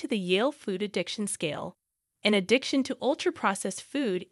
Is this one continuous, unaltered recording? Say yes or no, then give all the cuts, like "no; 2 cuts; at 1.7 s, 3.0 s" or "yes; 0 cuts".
yes; 0 cuts